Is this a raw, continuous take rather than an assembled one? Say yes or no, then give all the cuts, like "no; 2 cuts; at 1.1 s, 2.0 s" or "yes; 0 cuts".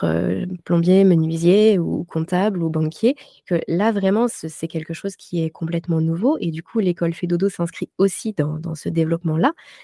yes; 0 cuts